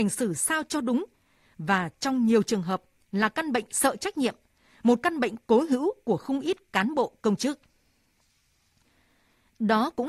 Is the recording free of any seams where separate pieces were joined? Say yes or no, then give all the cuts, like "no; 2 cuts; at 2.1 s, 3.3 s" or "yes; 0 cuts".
yes; 0 cuts